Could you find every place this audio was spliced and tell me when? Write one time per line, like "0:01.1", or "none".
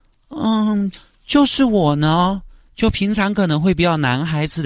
none

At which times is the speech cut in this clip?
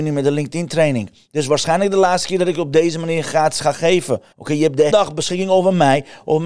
0:04.3
0:04.9

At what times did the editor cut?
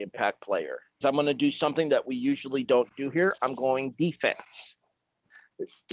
0:01.0

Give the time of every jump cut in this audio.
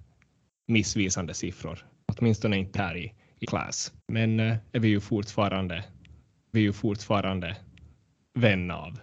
0:01.9
0:02.7
0:03.4
0:04.0
0:04.7
0:06.5

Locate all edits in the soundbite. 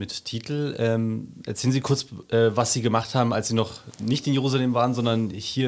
none

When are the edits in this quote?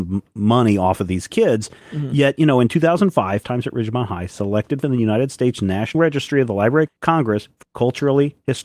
0:03.4
0:04.8
0:05.9
0:06.9
0:07.6

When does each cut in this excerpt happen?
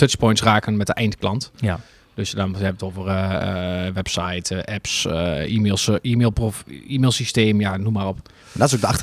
none

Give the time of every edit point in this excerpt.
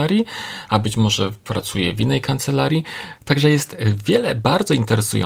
none

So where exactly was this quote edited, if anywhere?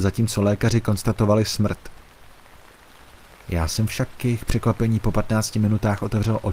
none

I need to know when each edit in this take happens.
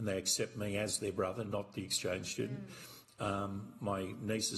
none

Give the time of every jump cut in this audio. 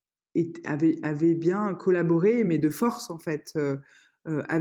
none

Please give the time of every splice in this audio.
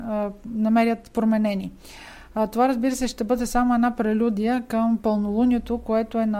none

